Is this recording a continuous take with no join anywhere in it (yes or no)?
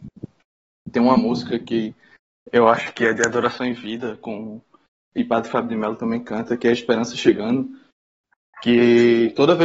yes